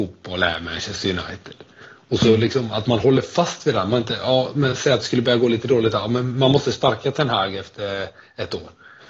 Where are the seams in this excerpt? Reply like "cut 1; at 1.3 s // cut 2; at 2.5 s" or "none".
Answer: none